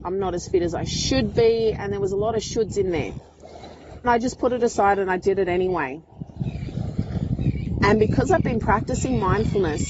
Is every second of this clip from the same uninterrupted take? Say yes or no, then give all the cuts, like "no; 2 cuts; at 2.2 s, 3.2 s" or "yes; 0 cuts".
no; 1 cut; at 4.0 s